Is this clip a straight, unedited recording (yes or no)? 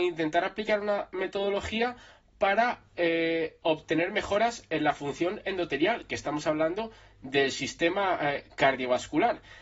yes